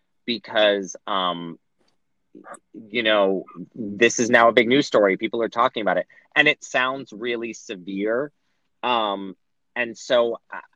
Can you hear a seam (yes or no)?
no